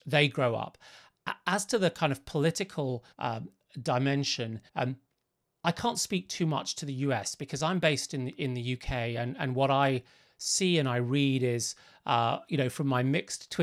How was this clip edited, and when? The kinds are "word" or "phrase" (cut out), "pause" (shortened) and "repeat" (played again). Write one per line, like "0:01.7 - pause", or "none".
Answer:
0:03.1 - pause
0:04.7 - pause